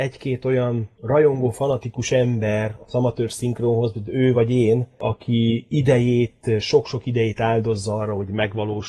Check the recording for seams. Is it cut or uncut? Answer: uncut